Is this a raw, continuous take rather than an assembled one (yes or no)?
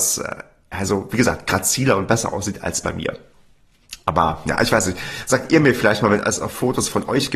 yes